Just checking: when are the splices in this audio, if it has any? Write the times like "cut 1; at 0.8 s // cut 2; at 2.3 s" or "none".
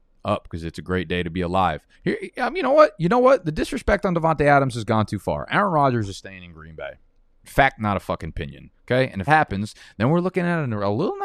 cut 1; at 1.9 s // cut 2; at 8.7 s // cut 3; at 9.3 s